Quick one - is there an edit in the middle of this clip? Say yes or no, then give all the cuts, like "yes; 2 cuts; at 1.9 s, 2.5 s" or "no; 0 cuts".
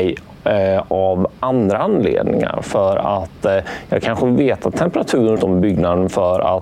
yes; 1 cut; at 5.4 s